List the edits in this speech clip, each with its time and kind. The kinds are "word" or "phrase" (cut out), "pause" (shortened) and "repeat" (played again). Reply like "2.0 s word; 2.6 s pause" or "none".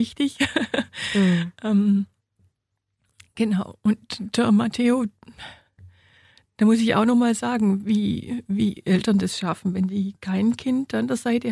none

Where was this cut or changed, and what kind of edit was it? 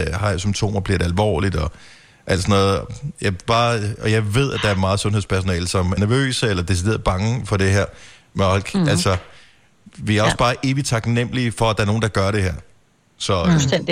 6.0 s word

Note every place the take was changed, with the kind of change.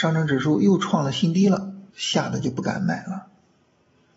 1.9 s pause

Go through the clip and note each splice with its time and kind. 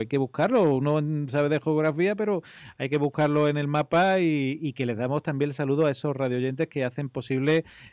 none

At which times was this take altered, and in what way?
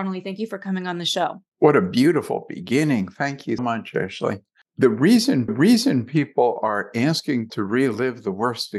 1.5 s pause; 3.6 s word; 5.5 s repeat; 7.5 s word

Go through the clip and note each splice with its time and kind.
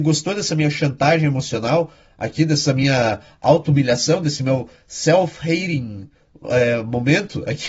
none

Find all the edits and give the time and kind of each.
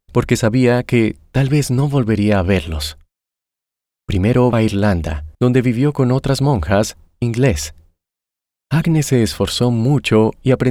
4.5 s word; 5.3 s pause; 7.2 s word

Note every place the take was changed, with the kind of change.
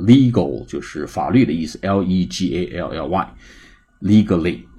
none

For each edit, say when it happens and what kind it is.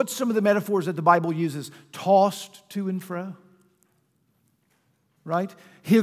none

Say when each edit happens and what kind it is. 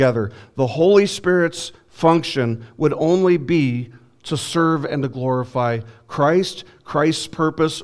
none

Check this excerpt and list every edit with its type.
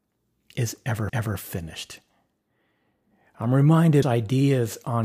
1.1 s repeat; 4.0 s phrase

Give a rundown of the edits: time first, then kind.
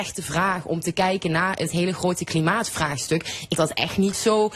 3.6 s word

